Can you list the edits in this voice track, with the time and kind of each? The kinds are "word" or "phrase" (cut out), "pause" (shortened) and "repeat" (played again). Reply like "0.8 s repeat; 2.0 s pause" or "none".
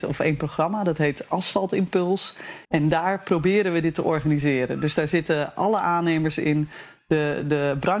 2.6 s pause